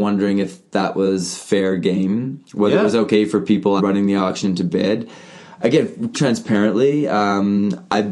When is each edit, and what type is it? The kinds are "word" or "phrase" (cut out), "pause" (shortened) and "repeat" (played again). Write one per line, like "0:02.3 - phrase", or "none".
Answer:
0:03.8 - word
0:06.1 - word